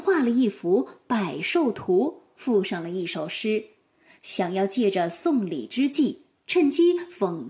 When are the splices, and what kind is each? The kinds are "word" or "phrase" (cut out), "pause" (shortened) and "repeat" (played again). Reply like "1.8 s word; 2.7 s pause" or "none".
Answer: none